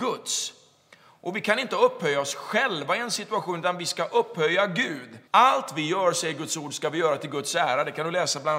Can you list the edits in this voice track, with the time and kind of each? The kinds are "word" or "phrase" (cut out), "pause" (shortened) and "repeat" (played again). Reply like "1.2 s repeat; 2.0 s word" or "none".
5.3 s pause